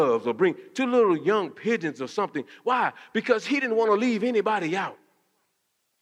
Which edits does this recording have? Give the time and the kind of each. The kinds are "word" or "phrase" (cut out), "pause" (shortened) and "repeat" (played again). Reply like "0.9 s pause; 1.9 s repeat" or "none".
none